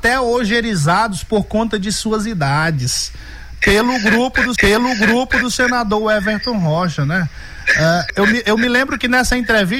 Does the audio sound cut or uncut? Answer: cut